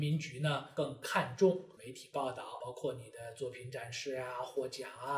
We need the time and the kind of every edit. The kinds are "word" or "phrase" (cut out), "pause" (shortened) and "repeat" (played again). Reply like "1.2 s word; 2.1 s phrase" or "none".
none